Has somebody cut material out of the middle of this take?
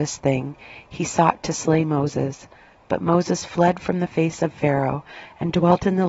no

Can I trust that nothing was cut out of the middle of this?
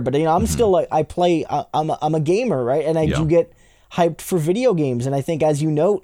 yes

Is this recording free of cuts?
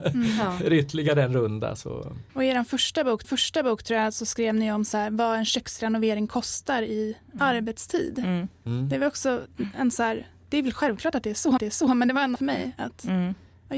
no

